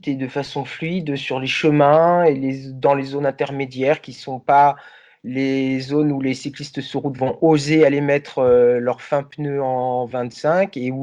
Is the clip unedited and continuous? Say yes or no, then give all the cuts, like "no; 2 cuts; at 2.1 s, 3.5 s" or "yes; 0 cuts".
yes; 0 cuts